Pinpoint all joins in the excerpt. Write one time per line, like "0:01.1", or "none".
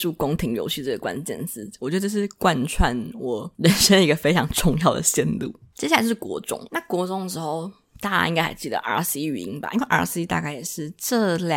none